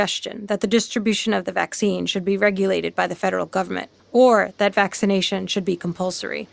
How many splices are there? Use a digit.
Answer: 1